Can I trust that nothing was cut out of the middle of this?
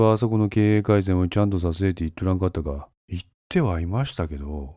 no; 1 cut; at 3.0 s

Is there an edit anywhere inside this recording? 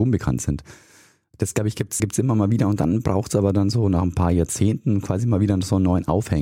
yes; 1 cut; at 2.0 s

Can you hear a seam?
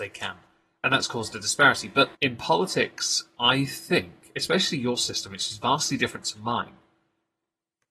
yes; 1 cut; at 2.1 s

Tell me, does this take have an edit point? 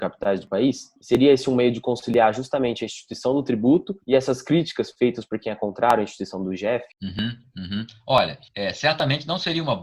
yes; 4 cuts; at 1.0 s, 4.0 s, 6.9 s, 8.5 s

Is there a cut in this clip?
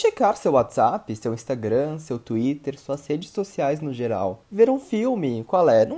yes; 1 cut; at 4.4 s

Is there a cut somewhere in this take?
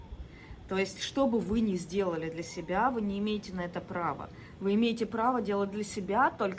no; 0 cuts

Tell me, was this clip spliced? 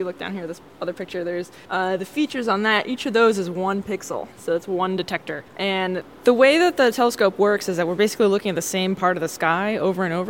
yes; 3 cuts; at 1.6 s, 4.3 s, 5.5 s

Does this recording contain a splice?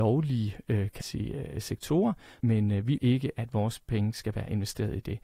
yes; 3 cuts; at 1.0 s, 2.4 s, 3.0 s

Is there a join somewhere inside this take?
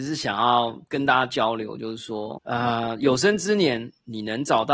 no; 0 cuts

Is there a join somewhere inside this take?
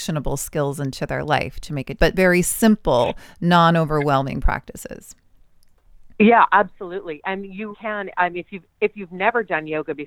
yes; 2 cuts; at 2.0 s, 7.7 s

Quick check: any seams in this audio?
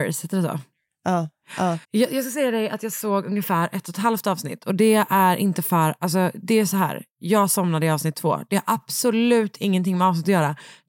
yes; 1 cut; at 1.8 s

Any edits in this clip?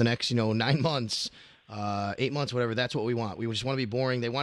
no; 0 cuts

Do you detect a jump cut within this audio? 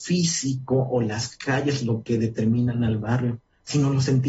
no; 0 cuts

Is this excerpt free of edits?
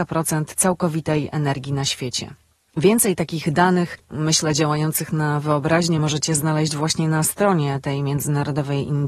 yes; 0 cuts

